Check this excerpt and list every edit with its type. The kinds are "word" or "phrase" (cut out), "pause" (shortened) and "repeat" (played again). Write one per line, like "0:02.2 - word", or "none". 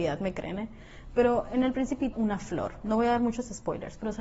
0:02.1 - phrase